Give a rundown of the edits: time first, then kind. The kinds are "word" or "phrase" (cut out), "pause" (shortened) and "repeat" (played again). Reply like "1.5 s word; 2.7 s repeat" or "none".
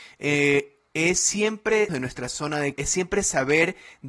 1.9 s word; 2.8 s word